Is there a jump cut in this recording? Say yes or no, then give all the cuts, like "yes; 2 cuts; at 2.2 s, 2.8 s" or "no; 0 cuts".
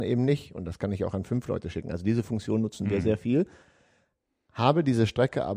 no; 0 cuts